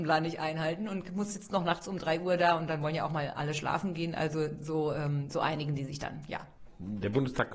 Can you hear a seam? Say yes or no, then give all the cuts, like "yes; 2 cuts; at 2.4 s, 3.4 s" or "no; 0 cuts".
no; 0 cuts